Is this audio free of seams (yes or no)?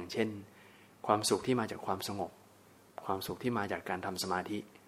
yes